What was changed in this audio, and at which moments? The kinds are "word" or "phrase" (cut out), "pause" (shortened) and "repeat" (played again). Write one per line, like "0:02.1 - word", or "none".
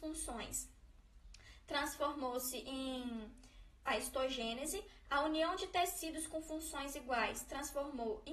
0:03.9 - word